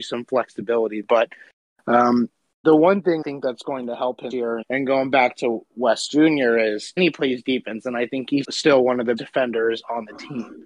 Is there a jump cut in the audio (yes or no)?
yes